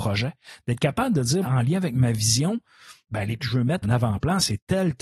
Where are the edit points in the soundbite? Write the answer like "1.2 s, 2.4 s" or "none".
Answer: 1.4 s, 3.4 s, 3.8 s